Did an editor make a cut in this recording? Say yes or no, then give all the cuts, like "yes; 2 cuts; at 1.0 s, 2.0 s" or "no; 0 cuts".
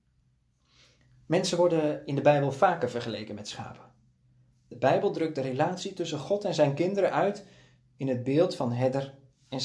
no; 0 cuts